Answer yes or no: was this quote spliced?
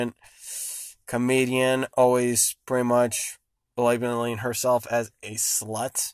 no